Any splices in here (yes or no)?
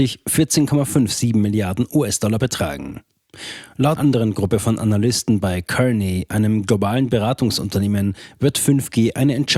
yes